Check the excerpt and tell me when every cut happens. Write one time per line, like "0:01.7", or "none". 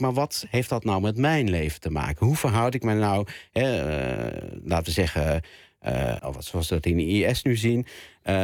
0:06.2